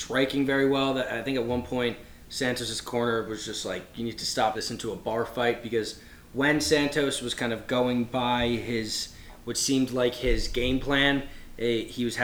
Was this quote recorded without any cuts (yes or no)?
no